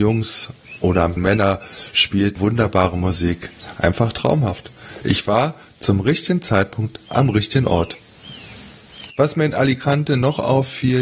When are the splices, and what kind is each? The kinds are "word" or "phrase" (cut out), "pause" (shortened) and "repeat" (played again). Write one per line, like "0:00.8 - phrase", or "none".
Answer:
0:01.2 - word
0:02.4 - word